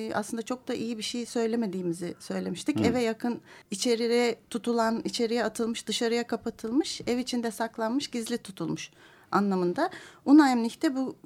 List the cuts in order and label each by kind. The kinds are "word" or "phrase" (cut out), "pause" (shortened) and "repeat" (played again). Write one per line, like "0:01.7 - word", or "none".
0:03.6 - pause